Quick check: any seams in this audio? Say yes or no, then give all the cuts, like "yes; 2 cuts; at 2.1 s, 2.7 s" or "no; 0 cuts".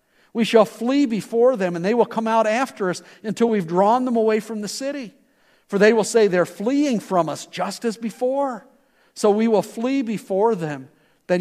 no; 0 cuts